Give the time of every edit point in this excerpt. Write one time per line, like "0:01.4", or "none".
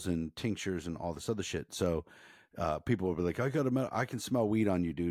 none

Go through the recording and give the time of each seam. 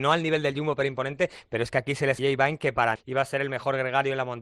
0:02.2
0:03.0

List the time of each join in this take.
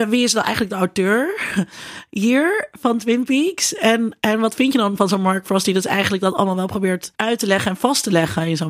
0:07.1

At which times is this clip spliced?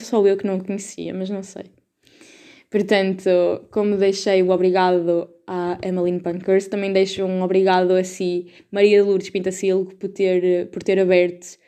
none

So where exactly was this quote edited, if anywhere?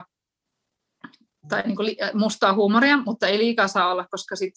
none

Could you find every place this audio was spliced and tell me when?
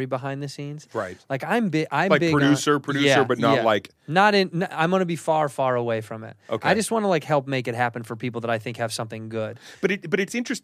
none

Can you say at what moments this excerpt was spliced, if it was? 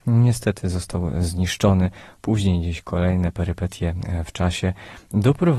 none

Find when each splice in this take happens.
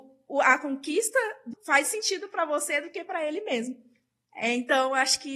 0:01.5
0:01.8

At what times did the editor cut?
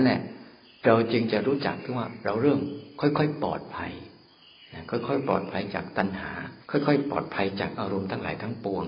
0:06.6

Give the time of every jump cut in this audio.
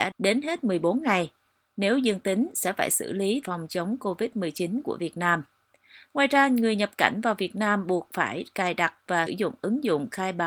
0:03.4
0:09.3

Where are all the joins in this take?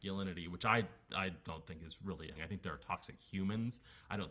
0:02.4

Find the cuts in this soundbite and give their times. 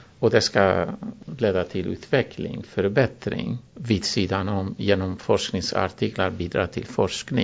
0:03.7

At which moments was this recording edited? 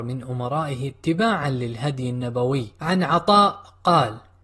none

